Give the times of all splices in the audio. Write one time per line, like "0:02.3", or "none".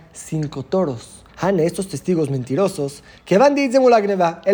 0:01.3

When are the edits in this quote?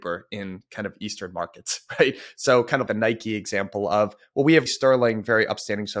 0:02.9
0:04.7

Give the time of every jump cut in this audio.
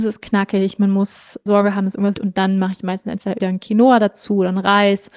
0:01.5
0:02.1
0:03.4

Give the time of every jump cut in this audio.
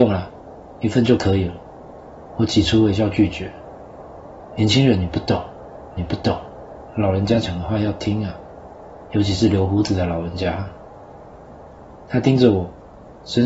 0:06.0

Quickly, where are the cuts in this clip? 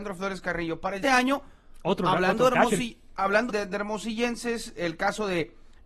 0:01.0
0:03.5
0:04.8

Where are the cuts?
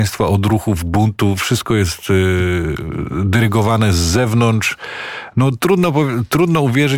none

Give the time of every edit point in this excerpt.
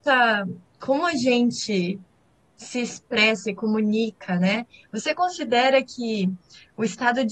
none

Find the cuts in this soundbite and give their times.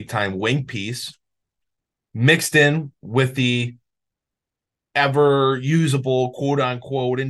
none

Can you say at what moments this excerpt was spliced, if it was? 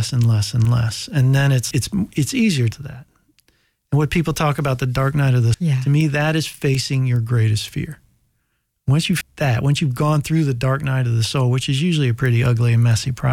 0:01.7
0:02.7
0:05.5
0:09.2

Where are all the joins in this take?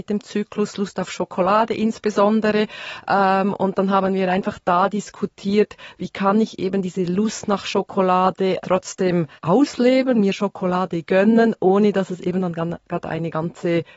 0:08.6
0:09.4

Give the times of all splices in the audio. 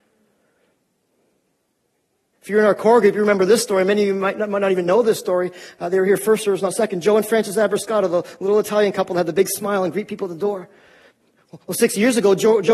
none

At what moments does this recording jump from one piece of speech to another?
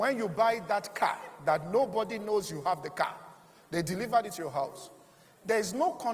none

